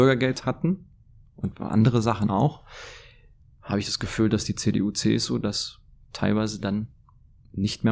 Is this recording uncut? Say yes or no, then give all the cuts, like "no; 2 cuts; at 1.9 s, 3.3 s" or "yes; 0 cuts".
yes; 0 cuts